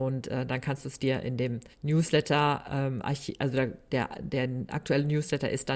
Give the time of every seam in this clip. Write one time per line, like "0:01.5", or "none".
0:01.7